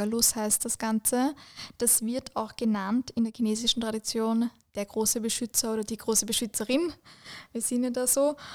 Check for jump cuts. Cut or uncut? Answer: uncut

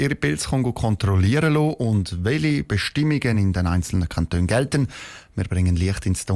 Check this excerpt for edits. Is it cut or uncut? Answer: uncut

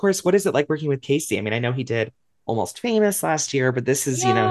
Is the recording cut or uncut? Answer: uncut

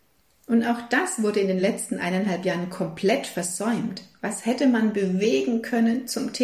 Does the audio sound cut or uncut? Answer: uncut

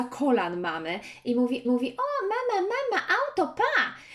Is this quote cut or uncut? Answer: cut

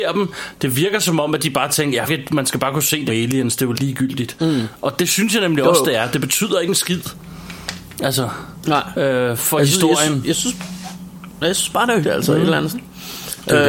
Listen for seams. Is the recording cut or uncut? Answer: cut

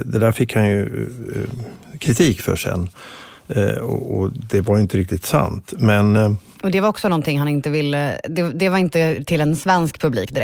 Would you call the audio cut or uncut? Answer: uncut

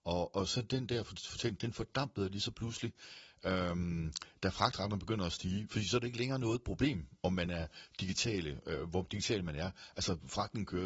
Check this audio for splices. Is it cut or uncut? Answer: uncut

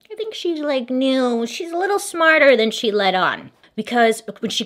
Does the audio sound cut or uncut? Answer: uncut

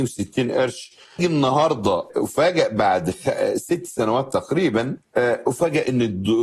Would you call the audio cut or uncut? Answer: cut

